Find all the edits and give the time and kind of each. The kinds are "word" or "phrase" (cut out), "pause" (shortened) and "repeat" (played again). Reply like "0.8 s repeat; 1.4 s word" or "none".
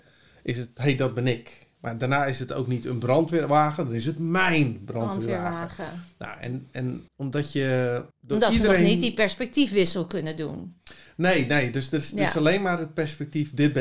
7.1 s pause; 8.1 s pause